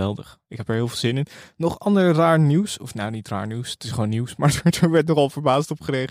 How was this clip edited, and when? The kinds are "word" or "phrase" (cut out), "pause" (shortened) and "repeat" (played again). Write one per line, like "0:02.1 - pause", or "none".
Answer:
none